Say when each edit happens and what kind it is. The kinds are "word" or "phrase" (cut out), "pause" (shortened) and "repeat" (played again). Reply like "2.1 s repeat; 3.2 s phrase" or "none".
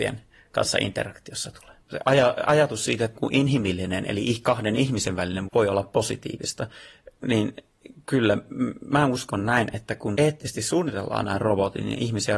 1.8 s pause; 3.1 s word; 5.5 s word; 7.2 s pause; 10.2 s word